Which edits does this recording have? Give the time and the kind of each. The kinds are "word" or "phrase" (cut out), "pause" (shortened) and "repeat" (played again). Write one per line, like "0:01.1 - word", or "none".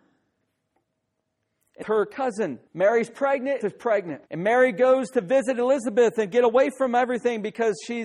0:01.8 - phrase
0:02.7 - pause
0:03.6 - word
0:04.3 - pause